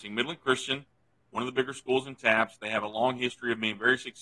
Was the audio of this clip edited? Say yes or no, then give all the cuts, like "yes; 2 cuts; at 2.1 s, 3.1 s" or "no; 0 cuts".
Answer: no; 0 cuts